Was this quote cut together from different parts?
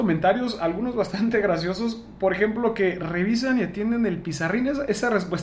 no; 0 cuts

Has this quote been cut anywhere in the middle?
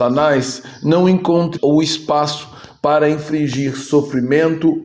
yes; 1 cut; at 1.6 s

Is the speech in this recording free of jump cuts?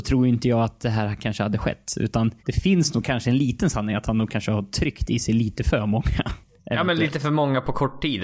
no; 1 cut; at 2.4 s

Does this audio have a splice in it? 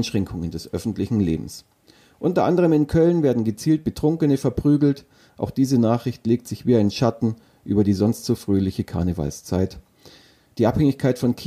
no; 0 cuts

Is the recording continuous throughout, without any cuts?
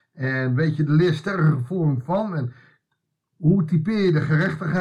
yes; 0 cuts

